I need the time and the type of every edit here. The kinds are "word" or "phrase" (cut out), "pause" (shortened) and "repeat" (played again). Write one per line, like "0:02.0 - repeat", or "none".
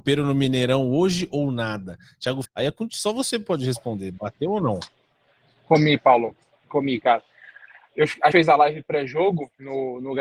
0:02.4 - word
0:08.3 - word